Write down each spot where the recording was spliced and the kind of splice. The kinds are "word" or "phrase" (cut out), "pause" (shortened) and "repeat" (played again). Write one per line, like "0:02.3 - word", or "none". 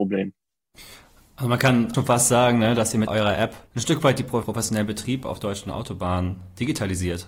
0:01.9 - word
0:03.1 - word
0:03.7 - pause
0:04.4 - word